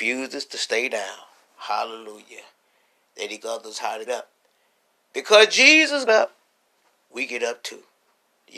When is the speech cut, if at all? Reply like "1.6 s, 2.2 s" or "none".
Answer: 3.4 s, 4.1 s, 6.1 s, 7.3 s